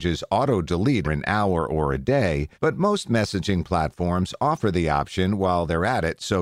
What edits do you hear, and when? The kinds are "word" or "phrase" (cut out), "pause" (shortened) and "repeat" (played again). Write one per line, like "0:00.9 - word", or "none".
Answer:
0:01.0 - word
0:02.5 - pause